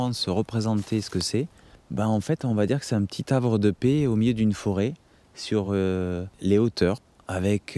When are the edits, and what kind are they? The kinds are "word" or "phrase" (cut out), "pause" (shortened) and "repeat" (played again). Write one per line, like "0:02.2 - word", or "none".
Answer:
none